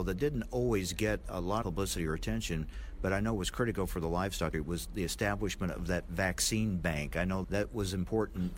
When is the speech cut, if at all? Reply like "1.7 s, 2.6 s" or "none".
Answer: 1.6 s, 4.5 s, 7.4 s